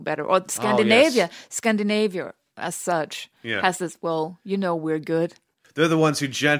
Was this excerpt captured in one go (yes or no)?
yes